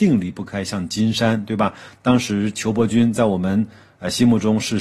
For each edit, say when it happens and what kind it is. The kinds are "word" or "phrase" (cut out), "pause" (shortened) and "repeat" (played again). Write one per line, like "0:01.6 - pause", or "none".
none